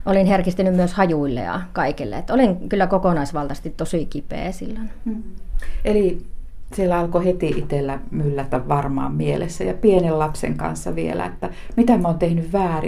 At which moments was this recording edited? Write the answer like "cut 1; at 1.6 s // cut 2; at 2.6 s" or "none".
none

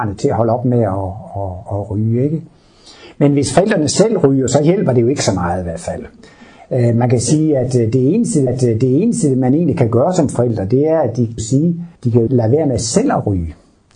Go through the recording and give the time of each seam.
cut 1; at 1.7 s // cut 2; at 8.5 s // cut 3; at 11.4 s // cut 4; at 12.0 s // cut 5; at 12.3 s

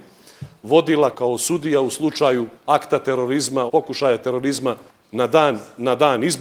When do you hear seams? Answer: cut 1; at 1.1 s // cut 2; at 2.6 s // cut 3; at 3.7 s // cut 4; at 4.9 s

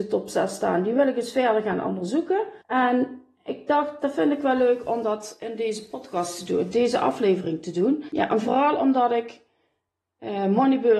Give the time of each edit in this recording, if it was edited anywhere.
cut 1; at 2.6 s

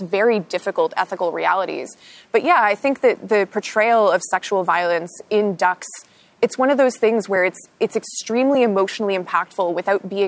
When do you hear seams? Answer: none

